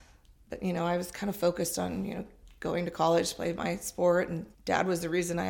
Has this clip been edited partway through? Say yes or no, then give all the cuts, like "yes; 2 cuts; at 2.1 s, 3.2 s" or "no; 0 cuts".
yes; 1 cut; at 4.5 s